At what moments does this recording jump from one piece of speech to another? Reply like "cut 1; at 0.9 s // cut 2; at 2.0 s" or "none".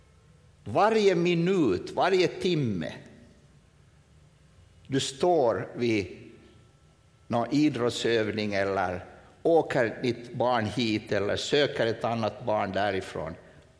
none